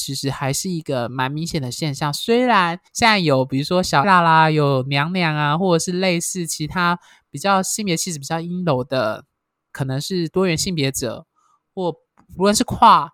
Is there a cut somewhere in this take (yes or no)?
yes